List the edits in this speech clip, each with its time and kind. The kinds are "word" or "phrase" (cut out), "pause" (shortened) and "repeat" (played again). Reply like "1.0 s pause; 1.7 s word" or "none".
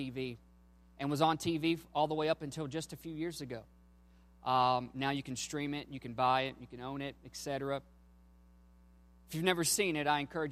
none